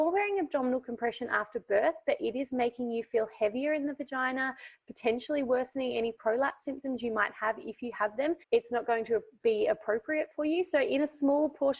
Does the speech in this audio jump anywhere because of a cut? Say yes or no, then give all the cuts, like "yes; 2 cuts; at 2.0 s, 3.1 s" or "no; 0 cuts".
yes; 1 cut; at 8.4 s